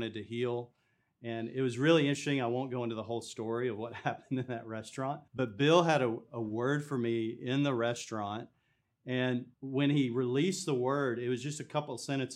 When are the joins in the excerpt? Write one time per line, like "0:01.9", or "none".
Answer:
0:05.3
0:09.5